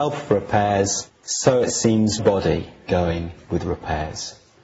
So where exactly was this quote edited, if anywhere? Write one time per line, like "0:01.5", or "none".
0:02.2
0:02.9